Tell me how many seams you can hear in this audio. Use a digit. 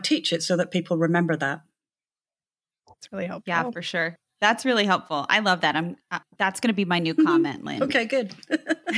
0